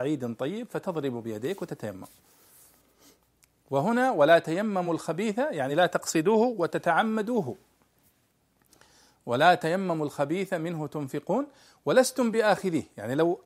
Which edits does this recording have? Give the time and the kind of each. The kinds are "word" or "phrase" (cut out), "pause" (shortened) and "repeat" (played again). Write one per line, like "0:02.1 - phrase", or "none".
none